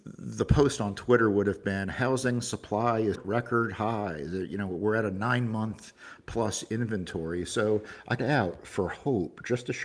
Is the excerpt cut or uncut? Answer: cut